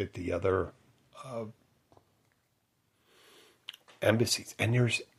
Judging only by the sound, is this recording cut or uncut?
uncut